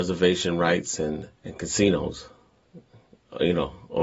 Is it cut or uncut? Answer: cut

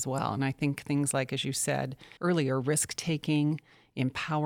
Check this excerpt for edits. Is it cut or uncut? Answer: cut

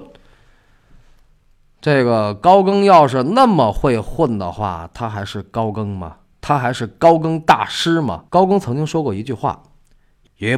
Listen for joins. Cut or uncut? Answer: cut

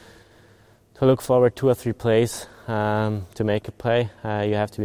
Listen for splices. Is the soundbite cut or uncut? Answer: uncut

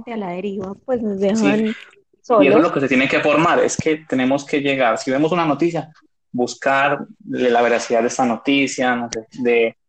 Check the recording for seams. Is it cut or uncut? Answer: uncut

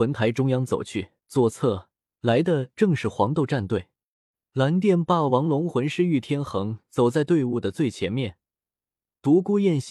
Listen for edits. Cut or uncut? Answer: cut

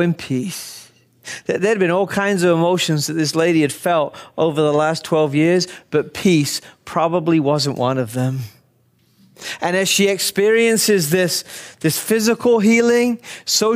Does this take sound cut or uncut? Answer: uncut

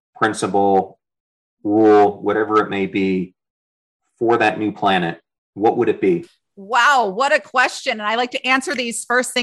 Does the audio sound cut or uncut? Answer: uncut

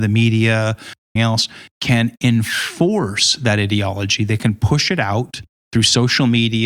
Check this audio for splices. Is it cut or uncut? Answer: cut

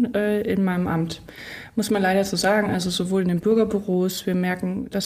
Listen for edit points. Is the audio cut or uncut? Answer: uncut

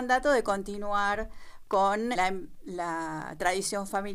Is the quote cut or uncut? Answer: cut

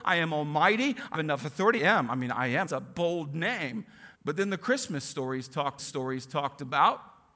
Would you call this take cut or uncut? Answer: cut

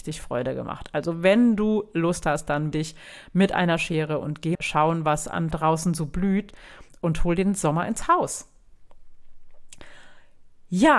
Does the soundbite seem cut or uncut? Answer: cut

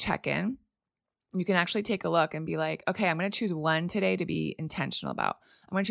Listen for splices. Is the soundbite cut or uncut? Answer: uncut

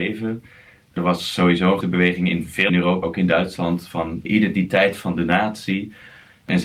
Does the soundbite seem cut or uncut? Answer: cut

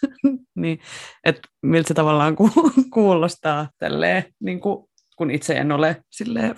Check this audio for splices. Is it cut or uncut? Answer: cut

